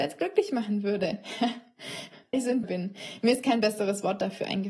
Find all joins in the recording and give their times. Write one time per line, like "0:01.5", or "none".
0:02.3
0:02.6